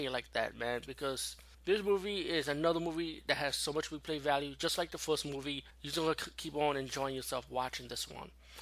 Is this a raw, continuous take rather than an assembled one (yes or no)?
no